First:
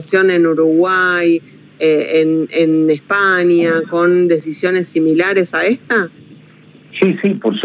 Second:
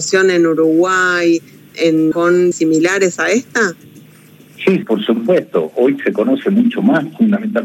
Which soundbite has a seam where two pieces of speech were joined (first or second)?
second